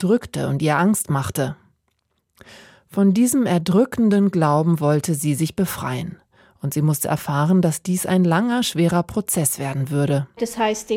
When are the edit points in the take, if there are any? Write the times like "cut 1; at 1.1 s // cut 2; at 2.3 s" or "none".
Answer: none

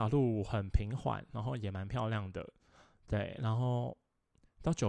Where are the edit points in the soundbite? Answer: none

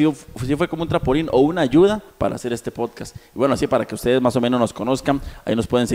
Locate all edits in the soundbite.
cut 1; at 2.1 s

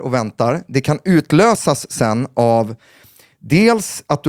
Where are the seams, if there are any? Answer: none

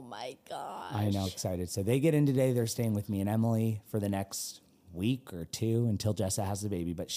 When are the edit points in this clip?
cut 1; at 1.3 s

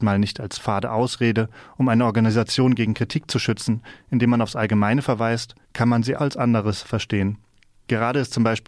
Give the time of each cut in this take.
cut 1; at 5.6 s // cut 2; at 6.2 s

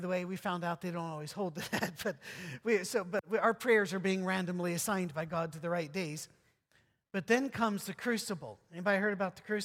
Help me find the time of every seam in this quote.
none

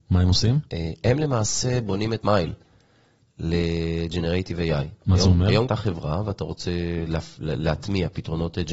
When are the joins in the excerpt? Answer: cut 1; at 2.2 s // cut 2; at 5.7 s

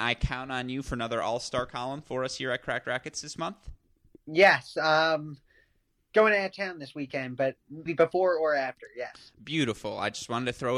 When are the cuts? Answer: cut 1; at 7.9 s

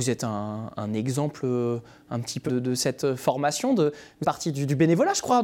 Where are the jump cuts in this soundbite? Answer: cut 1; at 2.5 s // cut 2; at 4.2 s

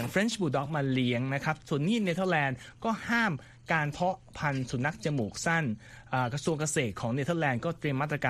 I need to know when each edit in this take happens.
none

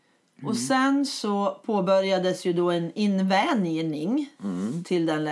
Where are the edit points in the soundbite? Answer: none

